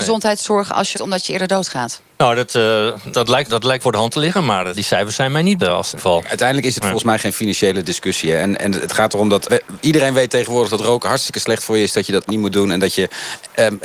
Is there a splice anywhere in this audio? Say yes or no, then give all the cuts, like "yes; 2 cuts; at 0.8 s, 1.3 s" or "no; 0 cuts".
yes; 9 cuts; at 0.9 s, 3.1 s, 3.5 s, 3.8 s, 4.7 s, 5.6 s, 6.0 s, 9.5 s, 12.3 s